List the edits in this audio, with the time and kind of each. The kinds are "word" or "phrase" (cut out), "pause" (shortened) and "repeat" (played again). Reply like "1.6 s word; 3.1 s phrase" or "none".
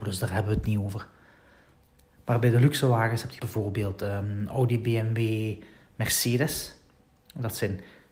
3.4 s word